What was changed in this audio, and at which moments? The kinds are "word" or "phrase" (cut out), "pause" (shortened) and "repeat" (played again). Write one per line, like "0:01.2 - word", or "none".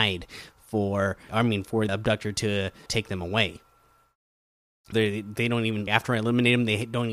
0:01.3 - word
0:01.9 - word
0:02.9 - word
0:04.9 - word
0:05.9 - word

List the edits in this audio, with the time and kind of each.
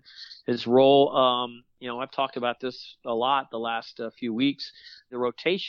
none

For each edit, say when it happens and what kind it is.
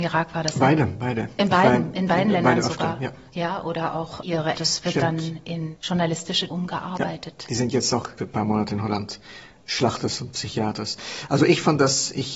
0:04.5 - phrase
0:06.5 - word
0:08.2 - phrase

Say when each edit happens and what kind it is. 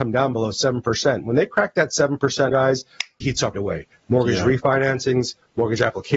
0:02.5 - word
0:03.2 - word
0:03.5 - word

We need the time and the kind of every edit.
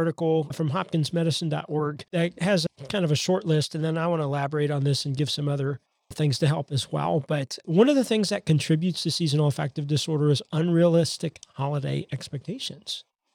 0:06.1 - word

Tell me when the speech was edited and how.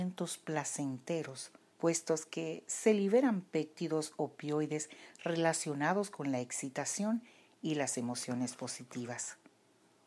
0:01.7 - pause

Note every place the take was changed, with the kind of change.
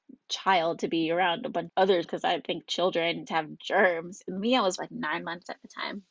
0:01.7 - word
0:02.0 - word
0:03.3 - word
0:04.8 - word

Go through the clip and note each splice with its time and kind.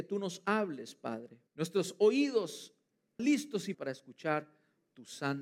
0:01.5 - pause
0:03.2 - word
0:03.7 - word

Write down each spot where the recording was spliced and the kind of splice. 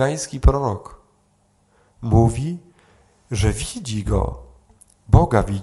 none

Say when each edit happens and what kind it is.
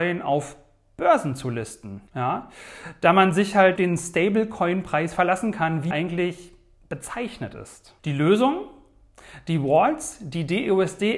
0:02.1 - pause
0:03.8 - phrase
0:05.9 - word
0:08.0 - pause

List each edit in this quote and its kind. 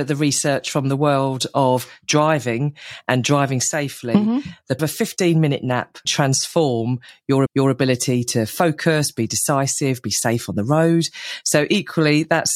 0:04.8 - phrase
0:06.1 - word
0:07.5 - repeat

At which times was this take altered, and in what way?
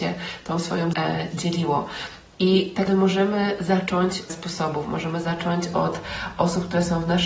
0:00.9 - word
0:02.9 - word
0:04.3 - phrase

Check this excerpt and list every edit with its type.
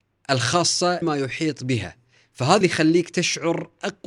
0:01.0 - word
0:02.6 - word

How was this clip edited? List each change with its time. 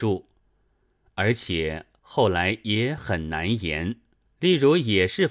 0:04.3 - pause

